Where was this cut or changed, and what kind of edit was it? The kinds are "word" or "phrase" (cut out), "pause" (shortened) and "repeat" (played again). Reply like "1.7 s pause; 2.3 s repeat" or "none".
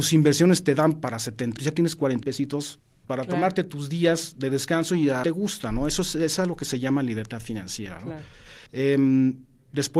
1.6 s word; 2.2 s word; 3.0 s word; 5.2 s phrase; 8.7 s pause